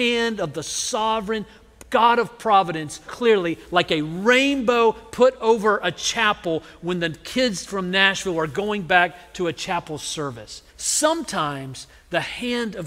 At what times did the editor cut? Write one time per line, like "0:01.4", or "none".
0:03.1
0:10.7